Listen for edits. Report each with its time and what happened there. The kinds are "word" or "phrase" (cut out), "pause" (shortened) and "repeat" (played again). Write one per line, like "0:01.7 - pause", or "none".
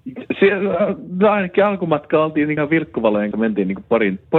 0:02.6 - word
0:03.3 - word